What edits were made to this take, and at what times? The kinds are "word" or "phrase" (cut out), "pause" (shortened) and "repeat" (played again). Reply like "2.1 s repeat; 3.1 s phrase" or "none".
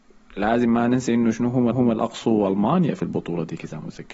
1.7 s repeat